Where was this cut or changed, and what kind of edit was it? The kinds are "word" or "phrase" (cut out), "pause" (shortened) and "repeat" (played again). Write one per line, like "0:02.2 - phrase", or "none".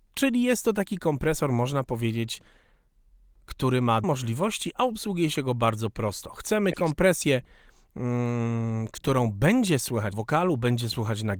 0:04.0 - word
0:10.1 - word